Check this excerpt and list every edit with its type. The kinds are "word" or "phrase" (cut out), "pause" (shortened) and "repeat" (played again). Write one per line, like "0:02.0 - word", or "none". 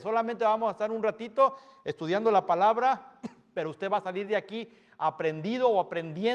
none